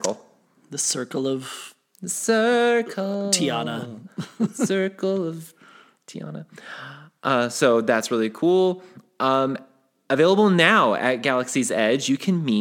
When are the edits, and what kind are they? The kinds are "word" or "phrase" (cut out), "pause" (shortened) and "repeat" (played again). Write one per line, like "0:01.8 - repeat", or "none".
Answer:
none